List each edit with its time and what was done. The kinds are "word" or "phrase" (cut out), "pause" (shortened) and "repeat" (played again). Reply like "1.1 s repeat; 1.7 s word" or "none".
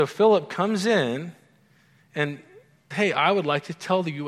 2.9 s word